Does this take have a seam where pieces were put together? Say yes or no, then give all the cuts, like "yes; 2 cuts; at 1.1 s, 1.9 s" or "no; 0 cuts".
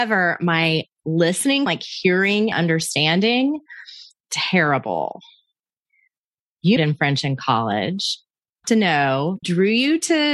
yes; 6 cuts; at 1.7 s, 2.5 s, 4.2 s, 6.8 s, 8.6 s, 9.4 s